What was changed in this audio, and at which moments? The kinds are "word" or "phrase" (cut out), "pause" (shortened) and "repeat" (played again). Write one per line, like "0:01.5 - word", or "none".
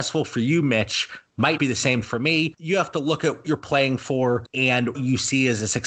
0:01.6 - word
0:02.0 - word
0:03.4 - word
0:04.9 - word